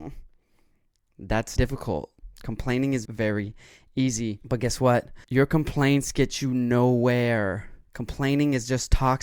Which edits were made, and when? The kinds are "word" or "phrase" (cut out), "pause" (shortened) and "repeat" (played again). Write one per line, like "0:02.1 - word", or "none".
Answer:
0:01.6 - word
0:03.0 - word
0:05.2 - pause
0:07.8 - pause